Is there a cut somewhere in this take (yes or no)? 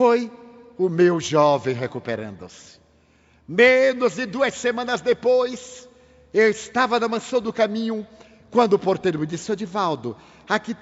no